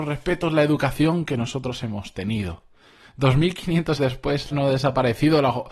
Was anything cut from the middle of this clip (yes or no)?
yes